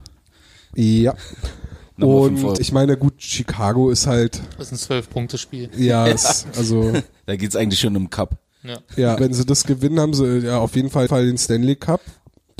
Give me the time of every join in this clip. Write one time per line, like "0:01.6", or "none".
0:02.6
0:09.2
0:11.1